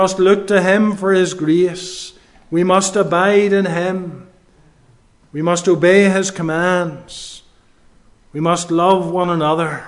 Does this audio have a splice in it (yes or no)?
no